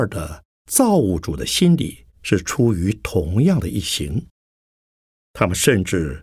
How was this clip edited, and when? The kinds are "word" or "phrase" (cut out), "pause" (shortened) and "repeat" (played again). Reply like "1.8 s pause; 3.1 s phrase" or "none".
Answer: 2.1 s pause

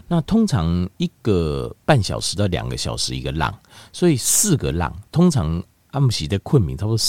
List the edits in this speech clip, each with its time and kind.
0.9 s pause

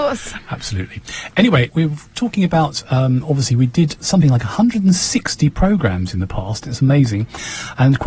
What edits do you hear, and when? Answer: 1.7 s word

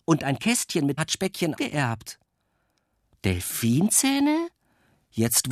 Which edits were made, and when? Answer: 1.0 s word; 1.6 s word

